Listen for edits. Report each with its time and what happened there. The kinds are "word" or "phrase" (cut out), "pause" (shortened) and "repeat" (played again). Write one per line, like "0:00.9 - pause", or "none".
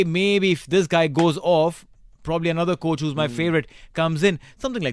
none